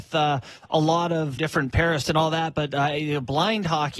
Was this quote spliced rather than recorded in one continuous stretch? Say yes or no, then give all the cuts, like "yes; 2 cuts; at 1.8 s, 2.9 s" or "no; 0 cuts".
yes; 2 cuts; at 1.4 s, 2.0 s